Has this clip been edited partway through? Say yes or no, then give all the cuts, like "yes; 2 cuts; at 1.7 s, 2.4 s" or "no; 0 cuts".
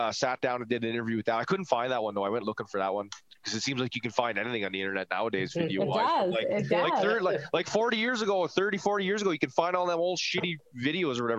no; 0 cuts